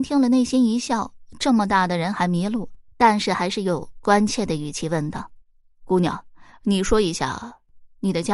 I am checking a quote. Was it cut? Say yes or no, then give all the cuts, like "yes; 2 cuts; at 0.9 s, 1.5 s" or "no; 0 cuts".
yes; 2 cuts; at 2.9 s, 5.4 s